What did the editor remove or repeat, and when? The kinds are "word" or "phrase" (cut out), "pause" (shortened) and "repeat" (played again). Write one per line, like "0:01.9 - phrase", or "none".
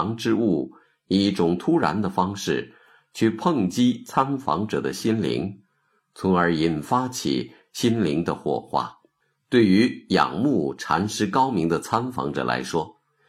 0:09.2 - pause